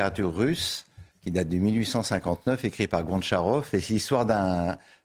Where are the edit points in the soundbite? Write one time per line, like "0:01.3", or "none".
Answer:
0:01.1